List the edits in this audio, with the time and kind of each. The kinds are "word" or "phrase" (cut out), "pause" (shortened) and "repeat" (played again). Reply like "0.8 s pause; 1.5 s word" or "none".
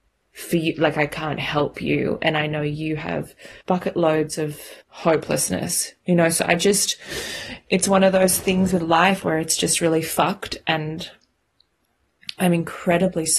3.6 s pause; 4.8 s pause